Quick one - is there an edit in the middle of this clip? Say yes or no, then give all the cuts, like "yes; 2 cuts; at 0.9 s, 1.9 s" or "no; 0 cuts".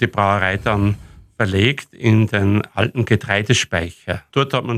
no; 0 cuts